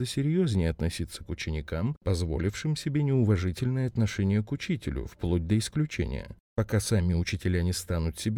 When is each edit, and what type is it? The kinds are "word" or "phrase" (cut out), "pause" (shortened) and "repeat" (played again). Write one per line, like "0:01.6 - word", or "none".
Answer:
none